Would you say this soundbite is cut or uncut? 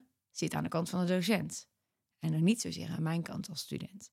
uncut